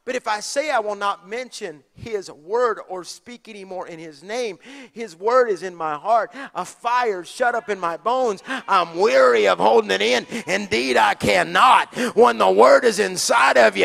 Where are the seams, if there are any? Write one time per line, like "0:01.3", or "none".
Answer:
none

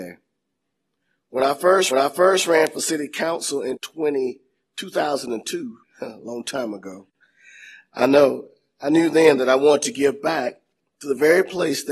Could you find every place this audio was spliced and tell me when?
0:01.9
0:05.8

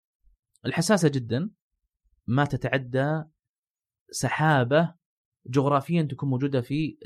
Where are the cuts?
none

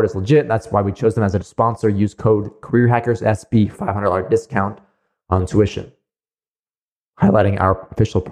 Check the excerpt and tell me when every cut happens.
0:01.4
0:03.7

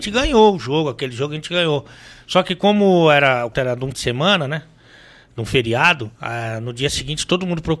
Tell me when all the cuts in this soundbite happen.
0:03.5
0:03.9
0:06.2

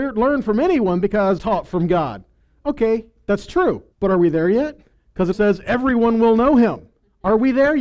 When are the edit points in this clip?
0:01.4
0:03.9
0:05.3

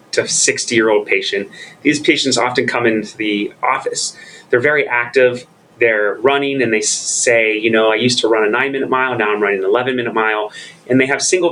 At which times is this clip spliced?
none

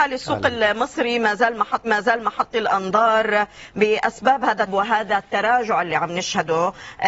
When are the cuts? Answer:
0:01.8
0:04.7

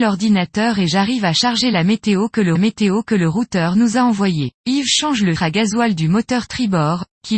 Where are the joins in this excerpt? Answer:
0:02.6
0:04.6
0:05.4

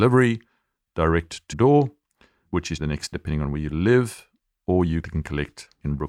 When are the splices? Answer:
0:01.5
0:02.5
0:02.8
0:03.1
0:05.0

